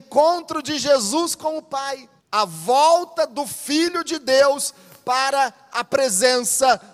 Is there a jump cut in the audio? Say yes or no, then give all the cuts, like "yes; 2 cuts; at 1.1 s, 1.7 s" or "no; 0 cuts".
yes; 1 cut; at 2.2 s